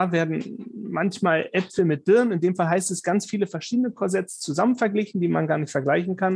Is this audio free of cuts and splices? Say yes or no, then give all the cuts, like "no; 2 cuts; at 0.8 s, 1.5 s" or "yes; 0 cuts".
yes; 0 cuts